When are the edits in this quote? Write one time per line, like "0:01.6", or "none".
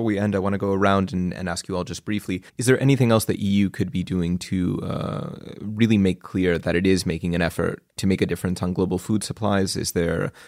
0:02.5